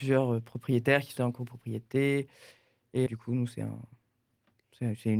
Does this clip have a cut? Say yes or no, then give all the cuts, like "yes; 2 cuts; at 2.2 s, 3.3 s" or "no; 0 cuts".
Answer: yes; 2 cuts; at 1.2 s, 3.1 s